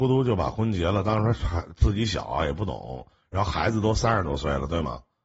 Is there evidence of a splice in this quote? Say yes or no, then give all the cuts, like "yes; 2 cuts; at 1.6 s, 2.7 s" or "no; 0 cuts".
no; 0 cuts